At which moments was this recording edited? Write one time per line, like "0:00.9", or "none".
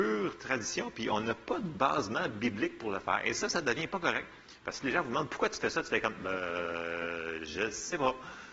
none

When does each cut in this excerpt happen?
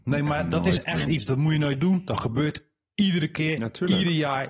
none

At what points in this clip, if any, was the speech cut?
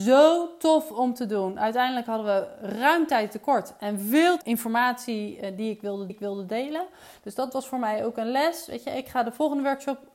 0:04.4
0:06.1

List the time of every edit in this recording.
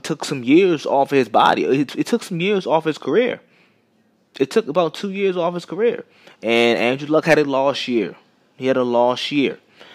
none

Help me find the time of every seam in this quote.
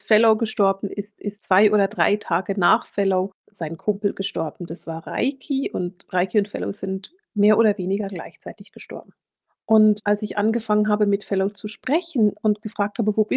none

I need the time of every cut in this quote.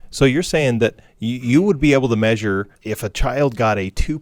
0:01.1

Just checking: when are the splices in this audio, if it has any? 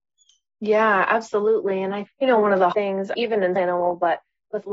0:02.1
0:02.7
0:03.1
0:03.6

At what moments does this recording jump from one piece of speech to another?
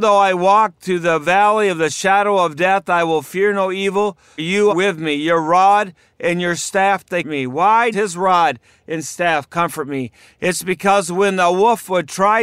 0:04.4
0:04.7
0:07.2
0:07.9

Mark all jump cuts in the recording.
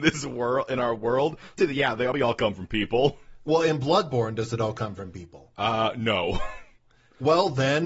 0:01.6
0:02.1

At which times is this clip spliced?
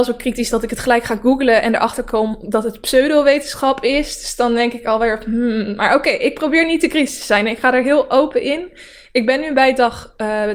none

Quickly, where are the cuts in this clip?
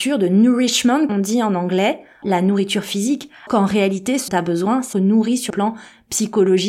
0:01.1
0:02.2
0:03.5
0:04.3
0:04.9
0:05.5

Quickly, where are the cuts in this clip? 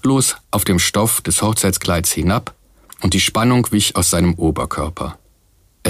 none

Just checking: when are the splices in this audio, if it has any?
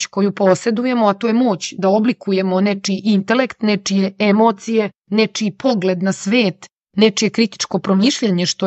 0:05.0

